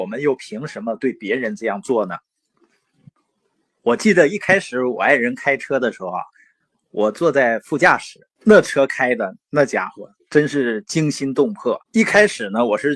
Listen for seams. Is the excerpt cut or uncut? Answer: cut